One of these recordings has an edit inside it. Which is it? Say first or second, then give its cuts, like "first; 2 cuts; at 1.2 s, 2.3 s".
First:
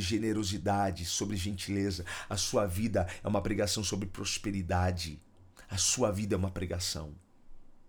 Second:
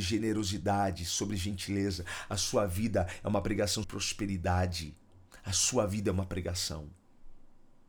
second; 1 cut; at 3.8 s